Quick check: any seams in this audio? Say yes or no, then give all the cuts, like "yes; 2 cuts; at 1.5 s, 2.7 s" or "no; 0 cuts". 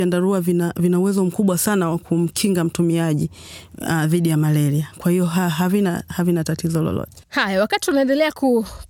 yes; 1 cut; at 7.2 s